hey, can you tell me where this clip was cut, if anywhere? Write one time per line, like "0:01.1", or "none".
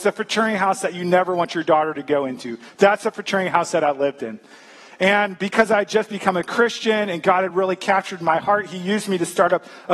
none

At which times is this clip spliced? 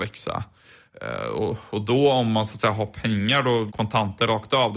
0:03.7

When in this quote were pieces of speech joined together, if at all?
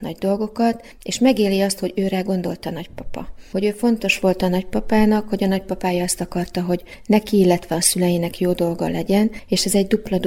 none

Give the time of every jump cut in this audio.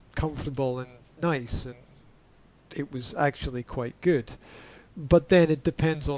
none

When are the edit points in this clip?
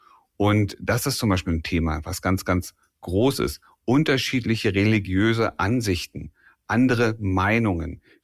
none

